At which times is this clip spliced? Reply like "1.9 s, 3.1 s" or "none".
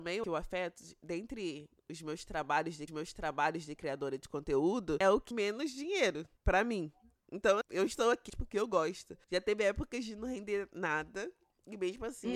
2.9 s, 5.3 s, 6.4 s, 7.6 s, 8.3 s